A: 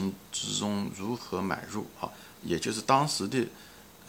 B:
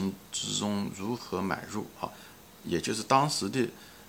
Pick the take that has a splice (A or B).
A